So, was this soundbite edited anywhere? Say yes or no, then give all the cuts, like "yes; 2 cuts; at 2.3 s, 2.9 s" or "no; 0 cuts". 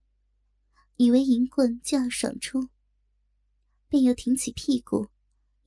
no; 0 cuts